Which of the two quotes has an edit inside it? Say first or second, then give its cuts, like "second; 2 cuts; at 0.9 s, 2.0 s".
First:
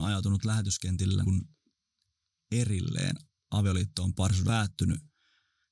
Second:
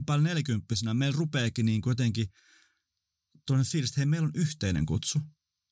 first; 3 cuts; at 1.2 s, 4.2 s, 4.5 s